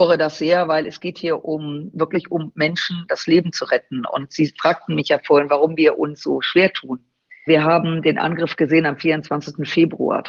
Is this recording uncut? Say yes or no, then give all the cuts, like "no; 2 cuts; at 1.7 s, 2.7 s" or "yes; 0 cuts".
yes; 0 cuts